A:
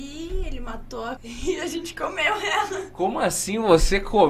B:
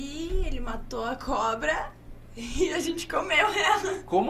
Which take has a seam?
A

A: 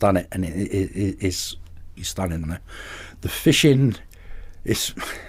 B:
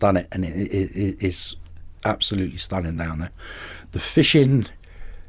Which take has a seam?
A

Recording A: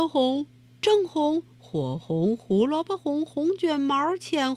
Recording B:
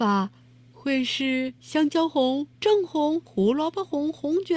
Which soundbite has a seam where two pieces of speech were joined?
B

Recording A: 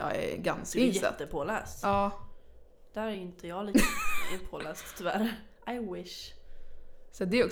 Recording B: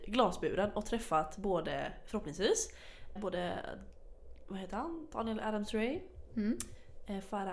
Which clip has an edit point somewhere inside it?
B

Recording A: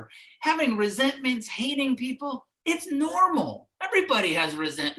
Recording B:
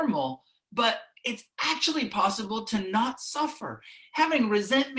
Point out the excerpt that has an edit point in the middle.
A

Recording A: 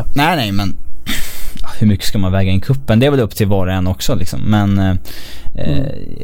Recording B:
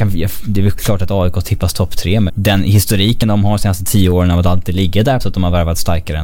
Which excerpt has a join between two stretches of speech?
B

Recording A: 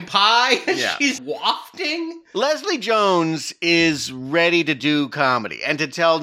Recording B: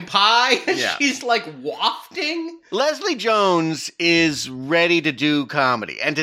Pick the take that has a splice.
A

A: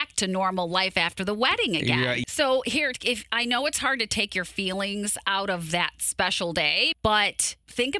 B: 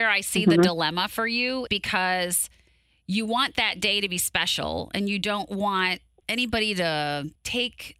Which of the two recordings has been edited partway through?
B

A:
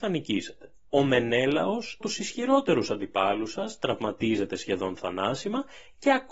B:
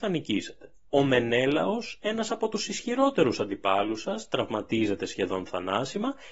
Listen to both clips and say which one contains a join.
A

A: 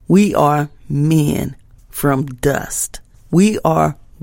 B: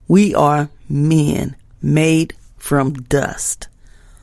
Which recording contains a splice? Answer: A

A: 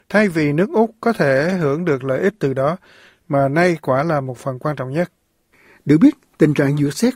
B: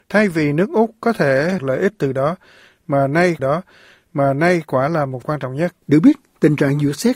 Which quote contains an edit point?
B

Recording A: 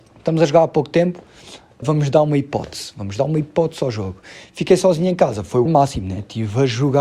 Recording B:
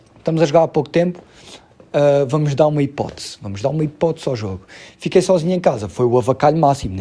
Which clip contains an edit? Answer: A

